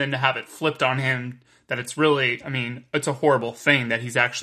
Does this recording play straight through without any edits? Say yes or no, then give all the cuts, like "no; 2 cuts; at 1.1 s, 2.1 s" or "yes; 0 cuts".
yes; 0 cuts